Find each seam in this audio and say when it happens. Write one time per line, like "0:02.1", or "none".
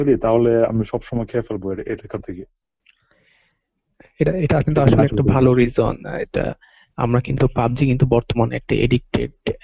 none